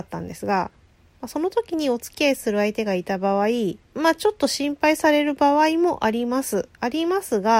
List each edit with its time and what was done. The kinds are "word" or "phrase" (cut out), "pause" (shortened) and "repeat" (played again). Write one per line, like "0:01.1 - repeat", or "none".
0:03.8 - pause